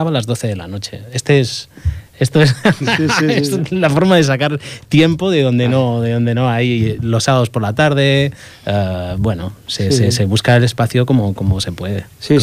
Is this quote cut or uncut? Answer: uncut